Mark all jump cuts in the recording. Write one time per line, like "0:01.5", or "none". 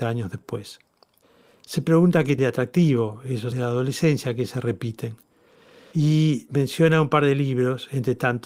0:02.4
0:03.5